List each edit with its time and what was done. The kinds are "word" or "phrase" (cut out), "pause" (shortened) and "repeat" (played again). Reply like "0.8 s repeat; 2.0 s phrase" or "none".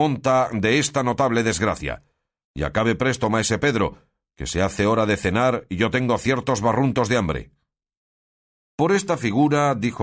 none